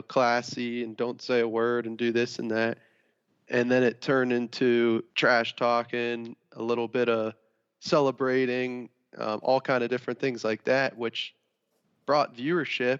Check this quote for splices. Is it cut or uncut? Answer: cut